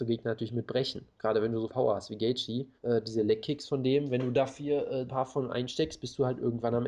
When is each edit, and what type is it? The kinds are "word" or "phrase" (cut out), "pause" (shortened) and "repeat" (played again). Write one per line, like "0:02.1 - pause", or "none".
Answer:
0:01.7 - word
0:02.8 - pause
0:05.1 - word